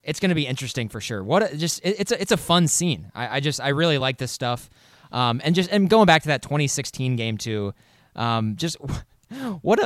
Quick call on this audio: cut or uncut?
uncut